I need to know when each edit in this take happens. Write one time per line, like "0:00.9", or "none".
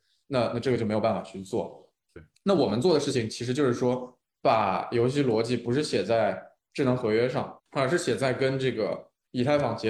0:02.3
0:07.6